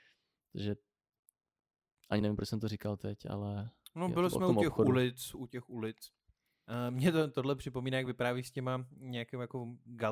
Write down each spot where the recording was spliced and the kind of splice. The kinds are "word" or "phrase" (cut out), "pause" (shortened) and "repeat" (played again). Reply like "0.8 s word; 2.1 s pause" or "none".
none